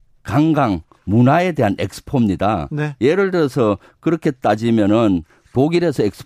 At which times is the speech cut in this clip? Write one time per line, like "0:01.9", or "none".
none